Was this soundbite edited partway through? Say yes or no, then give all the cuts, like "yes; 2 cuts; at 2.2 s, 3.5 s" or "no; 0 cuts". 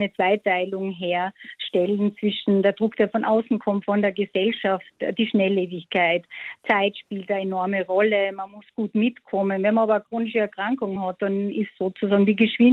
no; 0 cuts